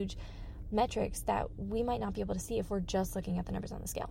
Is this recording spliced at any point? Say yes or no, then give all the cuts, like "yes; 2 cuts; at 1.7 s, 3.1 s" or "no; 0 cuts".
no; 0 cuts